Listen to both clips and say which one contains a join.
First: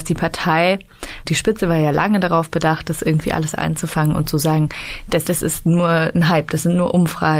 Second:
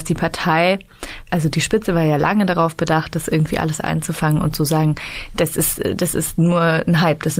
first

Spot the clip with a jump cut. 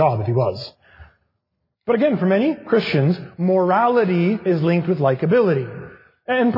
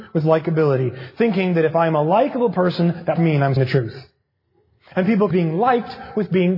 second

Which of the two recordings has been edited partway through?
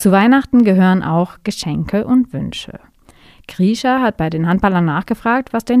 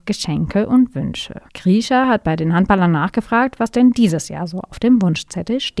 second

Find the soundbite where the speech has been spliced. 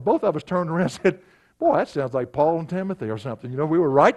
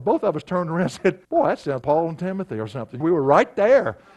second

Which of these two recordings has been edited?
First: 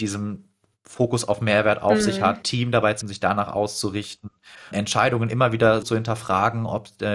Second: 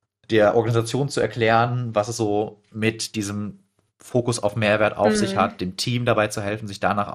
first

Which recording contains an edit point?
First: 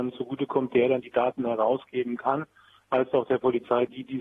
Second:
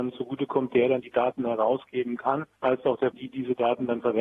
second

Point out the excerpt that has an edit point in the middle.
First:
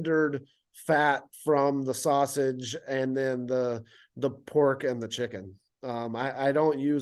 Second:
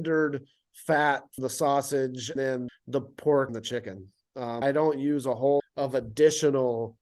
second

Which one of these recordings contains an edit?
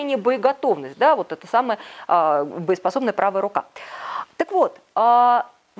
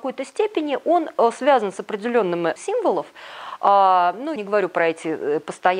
second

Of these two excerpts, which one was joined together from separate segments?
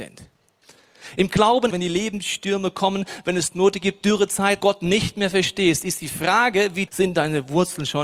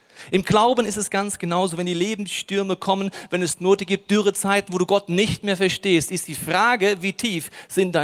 first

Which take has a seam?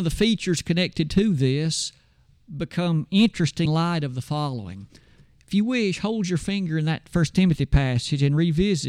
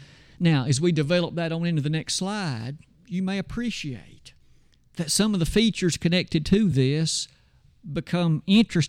first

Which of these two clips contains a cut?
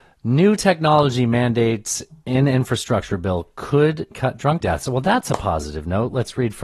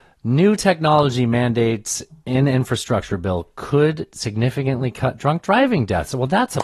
first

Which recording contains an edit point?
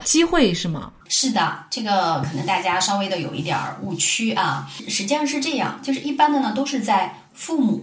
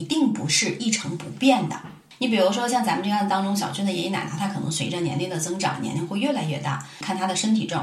first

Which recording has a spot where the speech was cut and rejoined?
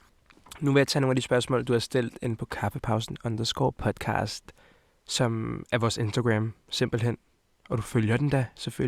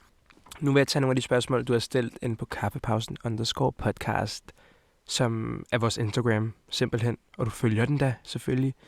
second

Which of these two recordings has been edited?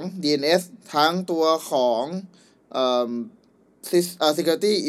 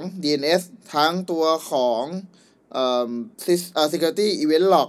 second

